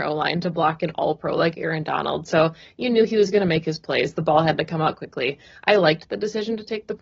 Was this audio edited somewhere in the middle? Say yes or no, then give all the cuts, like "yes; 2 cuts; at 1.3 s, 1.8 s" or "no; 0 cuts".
no; 0 cuts